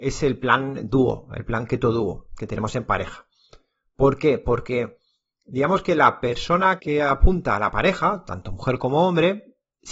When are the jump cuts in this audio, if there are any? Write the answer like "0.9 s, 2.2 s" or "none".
6.8 s